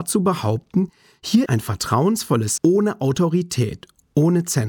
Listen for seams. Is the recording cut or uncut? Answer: cut